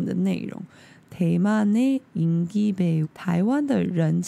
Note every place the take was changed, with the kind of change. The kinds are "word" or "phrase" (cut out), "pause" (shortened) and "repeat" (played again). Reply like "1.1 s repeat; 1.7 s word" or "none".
3.0 s word

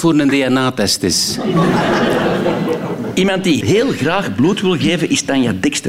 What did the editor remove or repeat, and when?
3.6 s word

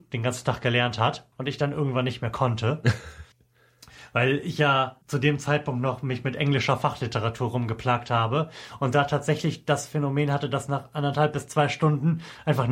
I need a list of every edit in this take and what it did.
1.3 s pause; 3.3 s pause; 5.0 s pause

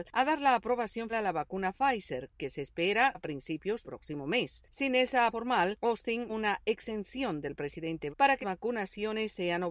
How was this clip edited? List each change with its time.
1.1 s word; 3.1 s word; 3.8 s word; 5.3 s word; 6.3 s word; 8.1 s word; 8.4 s word

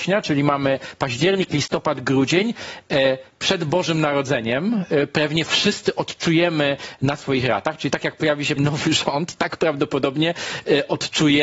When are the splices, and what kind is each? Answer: 8.6 s word

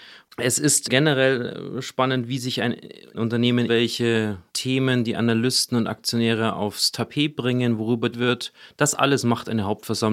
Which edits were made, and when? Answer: 3.7 s word; 4.5 s pause; 8.1 s word

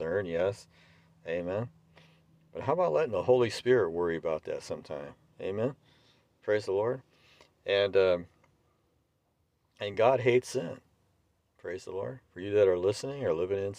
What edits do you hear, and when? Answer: none

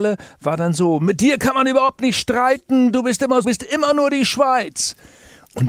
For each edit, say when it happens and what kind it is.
3.4 s phrase

